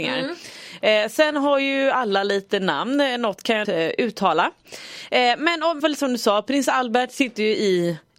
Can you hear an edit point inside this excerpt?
yes; 2 cuts; at 3.6 s, 5.8 s

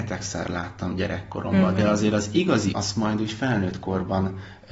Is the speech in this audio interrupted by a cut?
yes; 1 cut; at 2.7 s

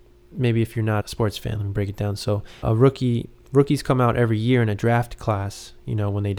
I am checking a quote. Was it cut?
yes; 2 cuts; at 1.0 s, 2.6 s

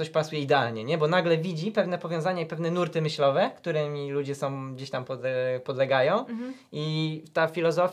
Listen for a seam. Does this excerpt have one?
no; 0 cuts

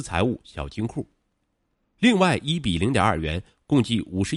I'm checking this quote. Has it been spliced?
no; 0 cuts

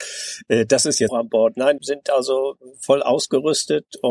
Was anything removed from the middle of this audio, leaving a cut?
yes; 2 cuts; at 1.1 s, 1.8 s

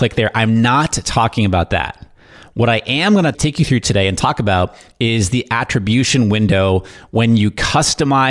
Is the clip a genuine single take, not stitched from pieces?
yes; 0 cuts

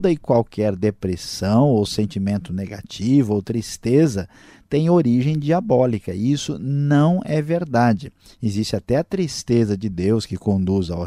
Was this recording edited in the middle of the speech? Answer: no; 0 cuts

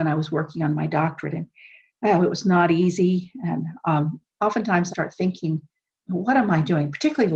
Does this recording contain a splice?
yes; 1 cut; at 4.9 s

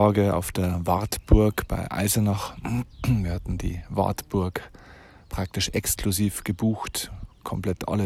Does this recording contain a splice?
no; 0 cuts

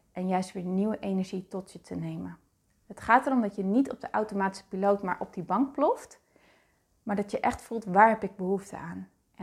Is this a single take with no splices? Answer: yes; 0 cuts

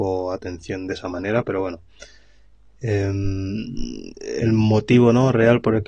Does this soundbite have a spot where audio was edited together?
no; 0 cuts

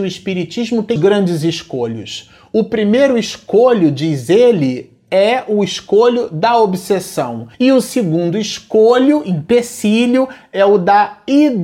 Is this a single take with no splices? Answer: no; 2 cuts; at 1.0 s, 7.5 s

